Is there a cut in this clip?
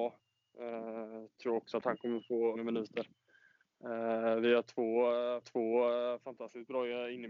yes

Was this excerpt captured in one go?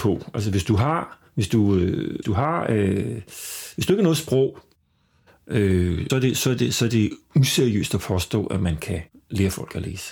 no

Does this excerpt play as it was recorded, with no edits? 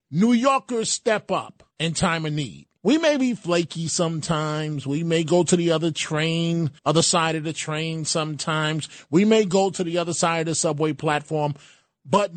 no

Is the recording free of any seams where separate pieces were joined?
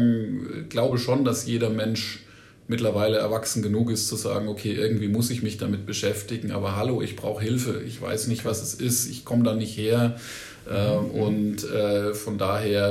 yes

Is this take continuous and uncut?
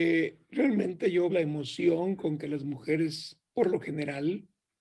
no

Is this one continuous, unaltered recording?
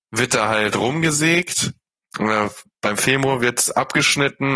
yes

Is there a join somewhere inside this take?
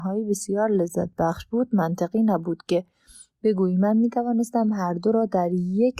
no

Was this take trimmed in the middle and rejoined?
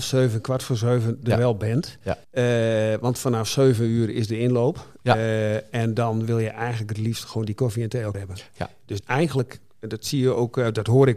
yes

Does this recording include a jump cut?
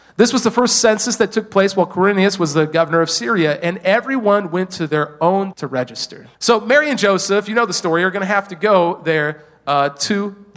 yes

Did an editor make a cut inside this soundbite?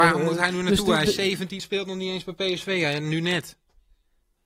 yes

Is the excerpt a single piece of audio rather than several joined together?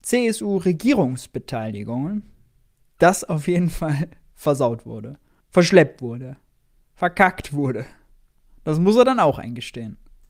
no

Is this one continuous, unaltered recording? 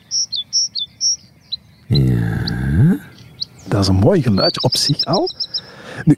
yes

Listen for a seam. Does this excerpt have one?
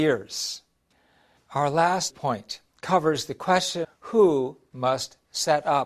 yes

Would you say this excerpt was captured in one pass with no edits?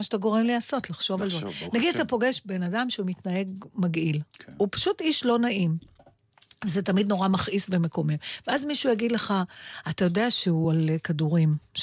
yes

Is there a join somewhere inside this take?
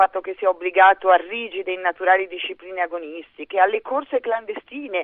no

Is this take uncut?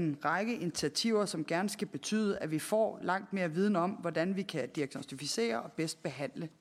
yes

